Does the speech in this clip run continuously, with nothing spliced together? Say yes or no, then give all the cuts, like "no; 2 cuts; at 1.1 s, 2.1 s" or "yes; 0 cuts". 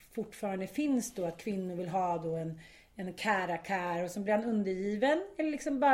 yes; 0 cuts